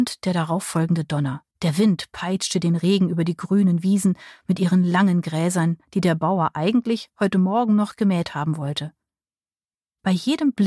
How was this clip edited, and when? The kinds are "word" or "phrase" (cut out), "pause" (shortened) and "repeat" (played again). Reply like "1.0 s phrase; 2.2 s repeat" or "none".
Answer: 1.5 s pause